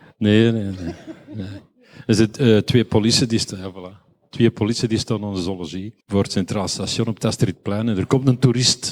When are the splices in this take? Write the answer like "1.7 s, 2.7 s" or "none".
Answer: 6.0 s